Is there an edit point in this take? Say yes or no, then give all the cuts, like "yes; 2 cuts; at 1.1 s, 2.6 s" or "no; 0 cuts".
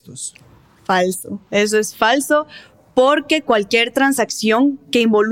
no; 0 cuts